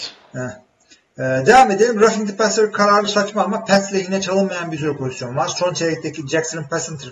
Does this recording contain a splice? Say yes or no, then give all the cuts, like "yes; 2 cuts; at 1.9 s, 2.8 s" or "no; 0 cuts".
no; 0 cuts